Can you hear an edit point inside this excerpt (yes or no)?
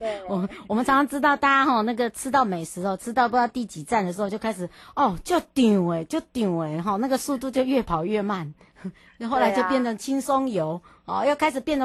no